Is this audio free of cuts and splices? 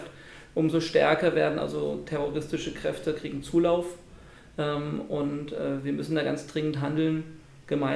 yes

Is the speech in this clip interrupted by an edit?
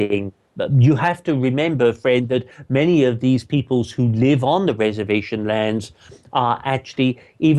no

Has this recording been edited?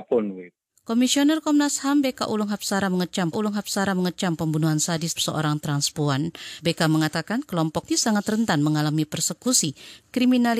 yes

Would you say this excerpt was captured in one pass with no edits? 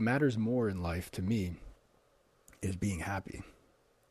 yes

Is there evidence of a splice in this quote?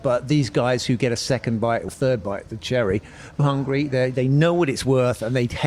yes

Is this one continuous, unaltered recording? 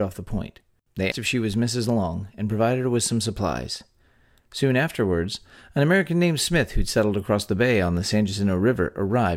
no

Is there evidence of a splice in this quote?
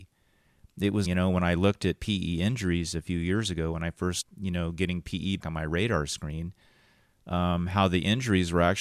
yes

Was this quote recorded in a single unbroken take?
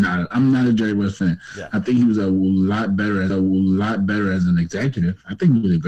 no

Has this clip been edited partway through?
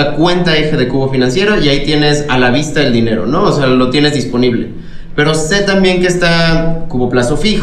no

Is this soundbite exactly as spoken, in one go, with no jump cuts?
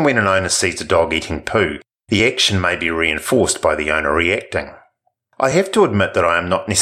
yes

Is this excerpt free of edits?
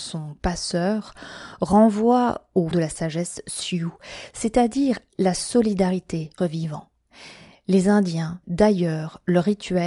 no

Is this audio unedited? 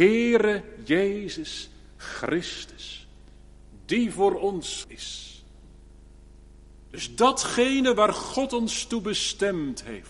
no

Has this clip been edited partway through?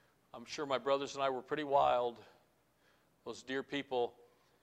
no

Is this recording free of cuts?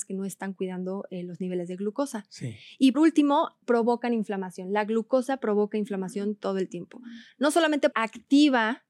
no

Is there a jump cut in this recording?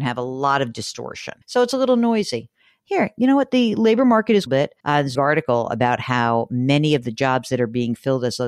yes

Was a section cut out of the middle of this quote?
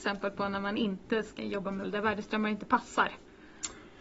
yes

